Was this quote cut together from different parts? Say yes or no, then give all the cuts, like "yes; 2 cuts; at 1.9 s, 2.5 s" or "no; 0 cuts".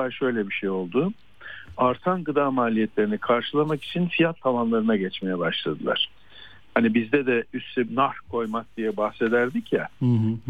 yes; 1 cut; at 7.9 s